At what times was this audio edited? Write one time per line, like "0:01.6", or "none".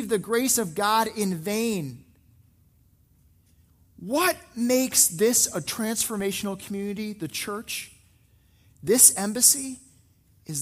none

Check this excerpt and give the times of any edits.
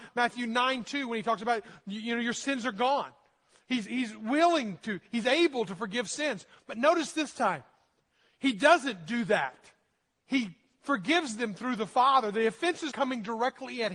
0:03.9
0:12.9

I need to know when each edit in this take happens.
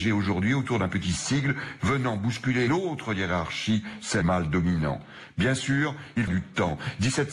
0:01.8
0:02.7
0:04.2
0:06.3

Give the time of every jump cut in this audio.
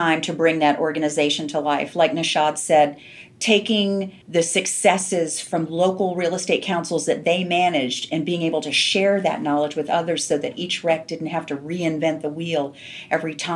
0:04.2

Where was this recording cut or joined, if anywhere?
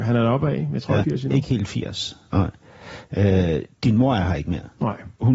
0:01.0
0:03.7

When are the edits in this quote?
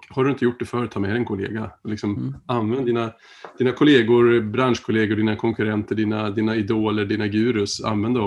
none

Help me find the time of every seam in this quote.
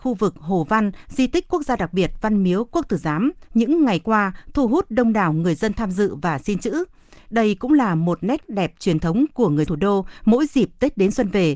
0:03.5
0:08.5
0:09.7

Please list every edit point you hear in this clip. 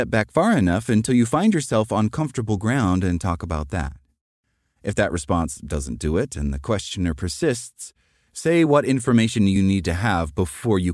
none

